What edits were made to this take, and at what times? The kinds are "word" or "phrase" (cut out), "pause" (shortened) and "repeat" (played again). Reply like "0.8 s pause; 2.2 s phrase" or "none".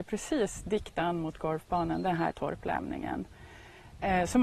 2.3 s word